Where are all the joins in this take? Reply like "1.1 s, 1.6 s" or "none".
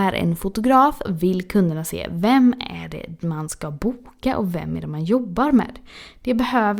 1.1 s